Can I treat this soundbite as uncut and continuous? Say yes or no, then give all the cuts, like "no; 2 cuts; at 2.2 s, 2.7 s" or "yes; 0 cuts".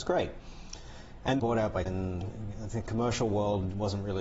no; 2 cuts; at 1.4 s, 1.9 s